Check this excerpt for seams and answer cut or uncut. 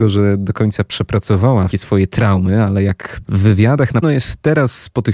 cut